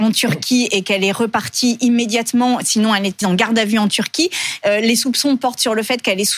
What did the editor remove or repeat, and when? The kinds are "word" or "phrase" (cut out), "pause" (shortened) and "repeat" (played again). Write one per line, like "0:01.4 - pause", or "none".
0:03.2 - word